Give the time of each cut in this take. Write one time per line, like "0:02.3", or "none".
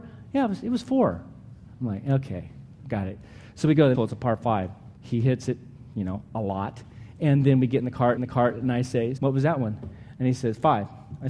0:03.9
0:05.0
0:08.2
0:09.2